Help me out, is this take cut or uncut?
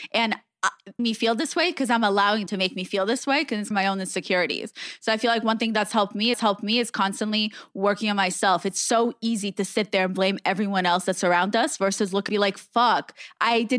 cut